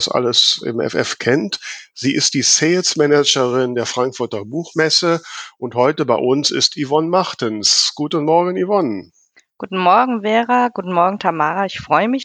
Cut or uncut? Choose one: uncut